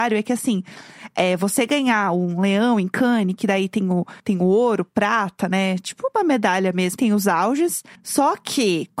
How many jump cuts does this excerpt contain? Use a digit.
3